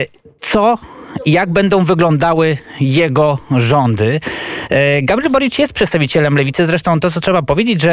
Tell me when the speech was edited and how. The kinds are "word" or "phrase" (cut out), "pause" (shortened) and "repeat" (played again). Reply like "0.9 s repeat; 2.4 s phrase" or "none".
none